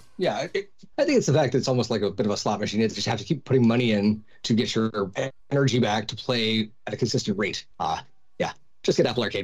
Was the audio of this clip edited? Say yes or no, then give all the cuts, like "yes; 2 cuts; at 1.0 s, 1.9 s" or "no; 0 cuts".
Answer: yes; 4 cuts; at 0.9 s, 4.3 s, 5.4 s, 7.7 s